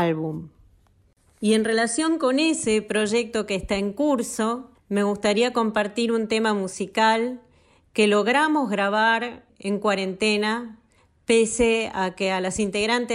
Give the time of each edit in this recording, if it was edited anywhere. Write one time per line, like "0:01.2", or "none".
none